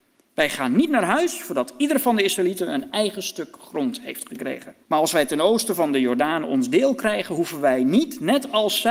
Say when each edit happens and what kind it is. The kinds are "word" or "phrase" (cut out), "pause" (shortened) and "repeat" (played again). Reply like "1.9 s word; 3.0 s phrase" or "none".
4.8 s pause